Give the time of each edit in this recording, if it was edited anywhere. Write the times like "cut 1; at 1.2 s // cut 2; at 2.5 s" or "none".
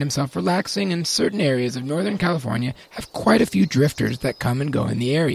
none